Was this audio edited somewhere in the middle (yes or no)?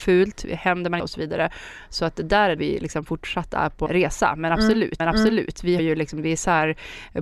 yes